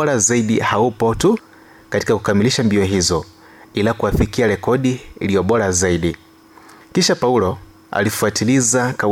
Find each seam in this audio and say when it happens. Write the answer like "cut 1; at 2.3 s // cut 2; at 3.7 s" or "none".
none